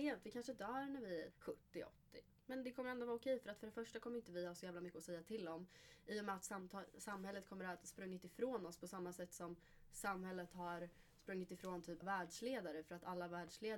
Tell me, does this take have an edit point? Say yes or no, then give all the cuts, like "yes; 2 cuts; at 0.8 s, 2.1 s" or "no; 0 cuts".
yes; 2 cuts; at 1.3 s, 12.0 s